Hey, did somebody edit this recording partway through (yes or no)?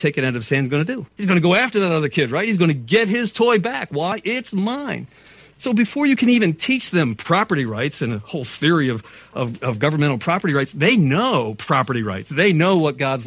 yes